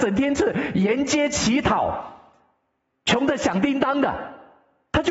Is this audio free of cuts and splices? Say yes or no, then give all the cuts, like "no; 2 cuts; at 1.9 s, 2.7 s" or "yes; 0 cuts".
yes; 0 cuts